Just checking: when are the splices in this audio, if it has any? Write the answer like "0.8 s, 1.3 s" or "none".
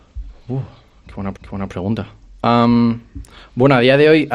1.3 s

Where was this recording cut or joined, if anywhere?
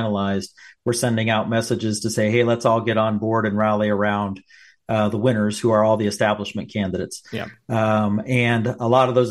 none

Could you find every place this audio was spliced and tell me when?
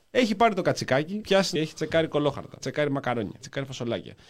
1.2 s, 1.6 s, 2.6 s, 3.4 s

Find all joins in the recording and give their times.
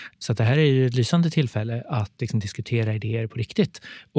none

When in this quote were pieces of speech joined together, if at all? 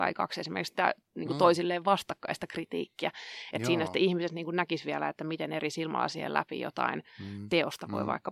none

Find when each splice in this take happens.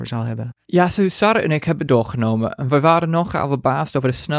1.9 s

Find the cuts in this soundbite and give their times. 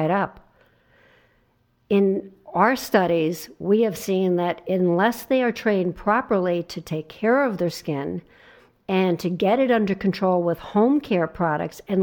none

